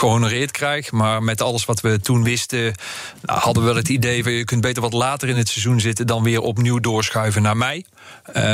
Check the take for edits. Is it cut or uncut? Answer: uncut